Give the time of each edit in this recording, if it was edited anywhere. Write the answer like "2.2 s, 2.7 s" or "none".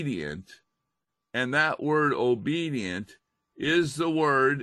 none